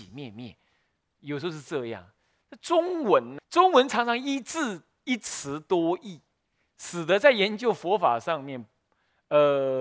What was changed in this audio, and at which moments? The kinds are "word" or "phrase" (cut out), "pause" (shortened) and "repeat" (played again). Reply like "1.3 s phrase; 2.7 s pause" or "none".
3.4 s word